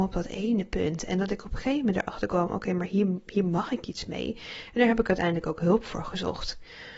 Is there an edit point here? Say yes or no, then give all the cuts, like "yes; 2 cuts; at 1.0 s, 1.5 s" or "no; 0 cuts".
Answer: no; 0 cuts